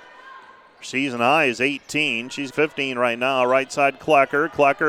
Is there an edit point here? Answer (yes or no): yes